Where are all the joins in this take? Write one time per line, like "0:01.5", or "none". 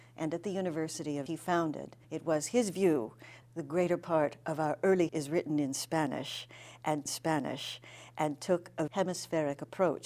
0:01.3
0:02.0
0:03.4
0:05.1
0:07.1
0:08.9